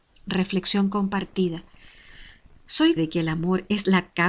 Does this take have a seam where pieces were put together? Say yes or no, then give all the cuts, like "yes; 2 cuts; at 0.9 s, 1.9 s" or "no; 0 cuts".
yes; 1 cut; at 3.0 s